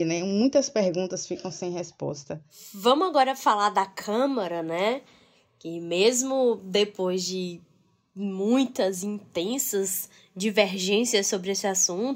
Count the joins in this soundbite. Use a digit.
0